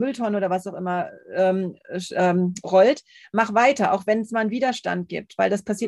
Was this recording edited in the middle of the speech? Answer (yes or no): no